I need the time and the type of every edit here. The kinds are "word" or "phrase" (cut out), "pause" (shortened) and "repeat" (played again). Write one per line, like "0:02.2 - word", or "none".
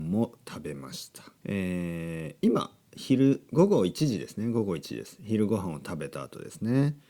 0:01.4 - pause